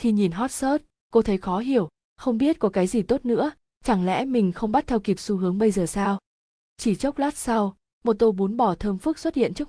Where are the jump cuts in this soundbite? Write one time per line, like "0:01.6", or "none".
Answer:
none